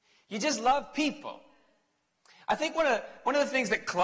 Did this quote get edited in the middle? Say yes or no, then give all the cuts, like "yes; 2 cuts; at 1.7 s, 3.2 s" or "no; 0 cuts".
no; 0 cuts